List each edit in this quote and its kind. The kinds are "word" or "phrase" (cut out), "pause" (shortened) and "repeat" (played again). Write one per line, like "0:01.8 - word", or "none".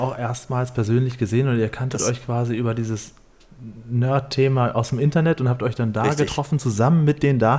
none